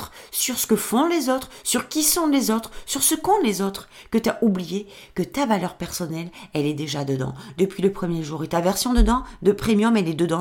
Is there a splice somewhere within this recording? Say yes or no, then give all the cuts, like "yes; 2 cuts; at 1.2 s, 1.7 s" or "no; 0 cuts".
no; 0 cuts